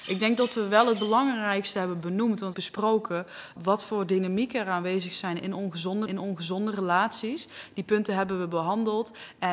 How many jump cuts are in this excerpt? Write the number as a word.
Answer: three